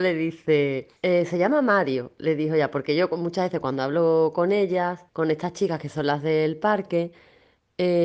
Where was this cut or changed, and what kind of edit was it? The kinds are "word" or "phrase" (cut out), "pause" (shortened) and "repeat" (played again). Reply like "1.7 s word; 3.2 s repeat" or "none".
1.0 s pause; 5.1 s pause